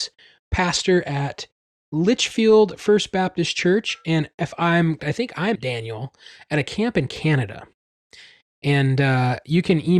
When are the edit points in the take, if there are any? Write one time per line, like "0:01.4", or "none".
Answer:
0:05.0
0:05.6